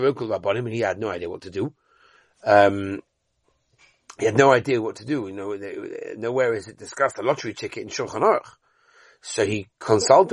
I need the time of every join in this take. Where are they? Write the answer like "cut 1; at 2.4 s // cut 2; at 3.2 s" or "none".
none